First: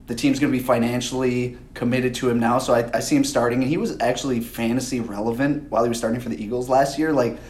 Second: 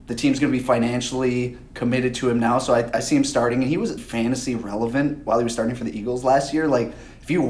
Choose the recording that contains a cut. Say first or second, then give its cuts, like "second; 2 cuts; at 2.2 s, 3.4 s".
second; 1 cut; at 4.0 s